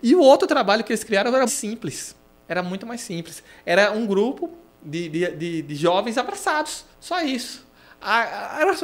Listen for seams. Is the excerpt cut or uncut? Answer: cut